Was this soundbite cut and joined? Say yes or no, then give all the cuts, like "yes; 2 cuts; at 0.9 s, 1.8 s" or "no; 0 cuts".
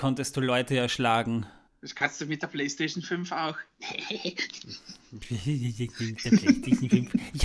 yes; 1 cut; at 1.7 s